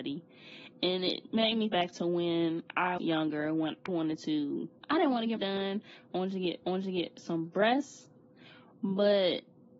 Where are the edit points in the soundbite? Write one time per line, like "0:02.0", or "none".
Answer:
0:01.7
0:03.0
0:03.9
0:04.8
0:05.4
0:06.6